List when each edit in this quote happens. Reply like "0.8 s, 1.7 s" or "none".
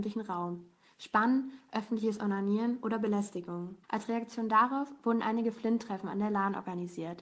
3.8 s